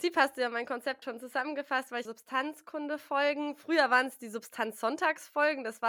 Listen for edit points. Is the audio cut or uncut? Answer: cut